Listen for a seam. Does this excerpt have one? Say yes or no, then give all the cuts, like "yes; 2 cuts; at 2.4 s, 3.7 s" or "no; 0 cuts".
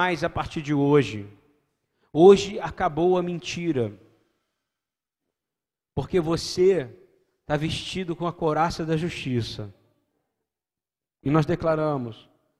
no; 0 cuts